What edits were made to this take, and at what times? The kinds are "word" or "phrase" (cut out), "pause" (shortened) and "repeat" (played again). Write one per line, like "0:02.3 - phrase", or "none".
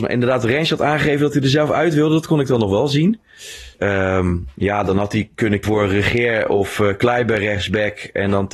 0:03.7 - pause
0:05.6 - word